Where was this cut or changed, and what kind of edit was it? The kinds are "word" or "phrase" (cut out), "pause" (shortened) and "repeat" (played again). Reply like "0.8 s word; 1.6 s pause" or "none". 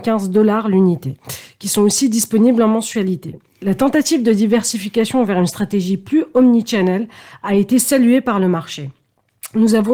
none